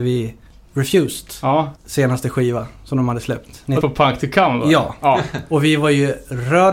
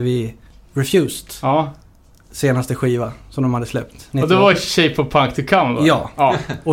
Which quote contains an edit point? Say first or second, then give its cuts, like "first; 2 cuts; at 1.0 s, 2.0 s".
first; 2 cuts; at 1.8 s, 3.8 s